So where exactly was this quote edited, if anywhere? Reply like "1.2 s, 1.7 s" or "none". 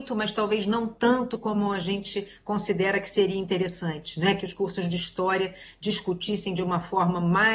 none